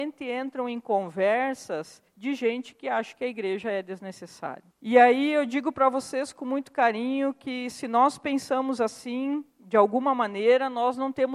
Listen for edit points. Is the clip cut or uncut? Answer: cut